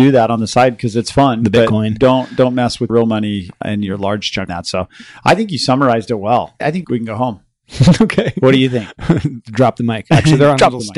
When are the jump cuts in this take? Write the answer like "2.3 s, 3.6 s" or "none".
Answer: 2.9 s, 4.5 s